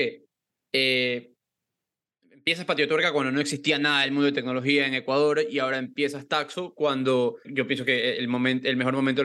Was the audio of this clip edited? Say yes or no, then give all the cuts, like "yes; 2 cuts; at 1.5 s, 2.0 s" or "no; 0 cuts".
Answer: yes; 1 cut; at 7.4 s